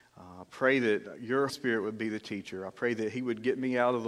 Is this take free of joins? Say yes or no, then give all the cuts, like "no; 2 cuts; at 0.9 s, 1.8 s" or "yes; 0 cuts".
no; 1 cut; at 1.5 s